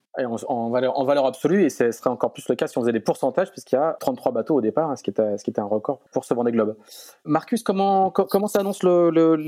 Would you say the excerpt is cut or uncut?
cut